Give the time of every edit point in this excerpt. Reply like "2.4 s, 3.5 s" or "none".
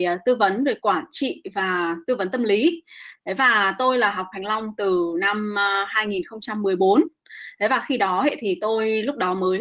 4.3 s